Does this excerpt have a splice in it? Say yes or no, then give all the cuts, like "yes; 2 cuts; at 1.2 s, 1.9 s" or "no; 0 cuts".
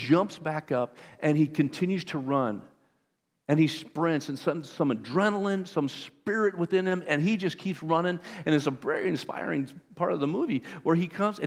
no; 0 cuts